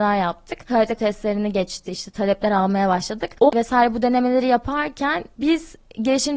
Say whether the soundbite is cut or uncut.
cut